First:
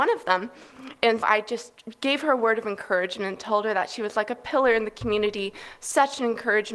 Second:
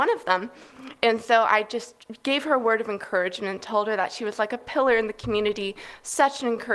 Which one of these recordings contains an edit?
first; 1 cut; at 1.2 s

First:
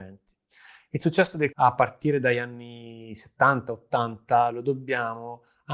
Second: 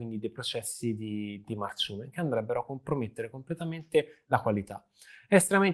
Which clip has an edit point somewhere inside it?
first; 1 cut; at 1.5 s

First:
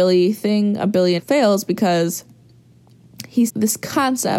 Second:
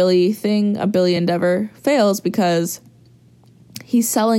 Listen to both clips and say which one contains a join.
first; 2 cuts; at 1.2 s, 3.5 s

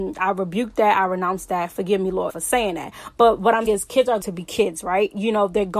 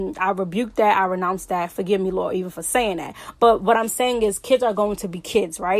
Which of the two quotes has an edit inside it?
first; 3 cuts; at 2.3 s, 3.7 s, 4.2 s

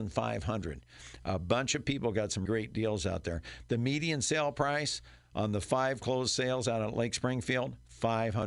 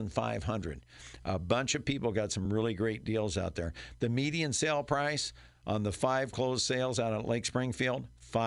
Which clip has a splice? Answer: first; 1 cut; at 2.5 s

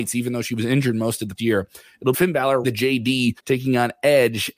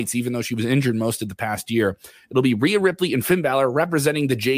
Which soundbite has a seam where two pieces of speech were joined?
first; 4 cuts; at 1.4 s, 2.1 s, 2.6 s, 3.4 s

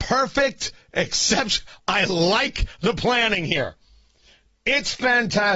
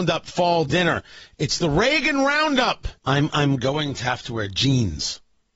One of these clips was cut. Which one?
second; 1 cut; at 3.0 s

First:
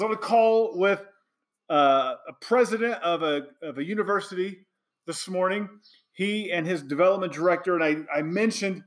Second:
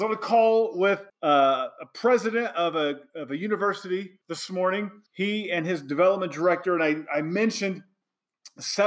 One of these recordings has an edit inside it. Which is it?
second; 3 cuts; at 1.1 s, 4.2 s, 5.1 s

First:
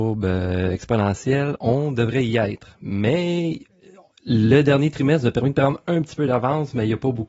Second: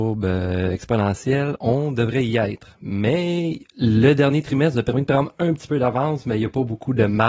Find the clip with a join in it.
second; 1 cut; at 3.7 s

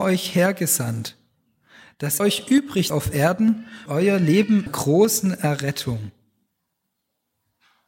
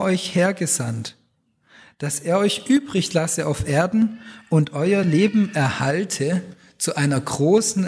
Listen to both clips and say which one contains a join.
first; 4 cuts; at 2.2 s, 2.9 s, 3.9 s, 4.7 s

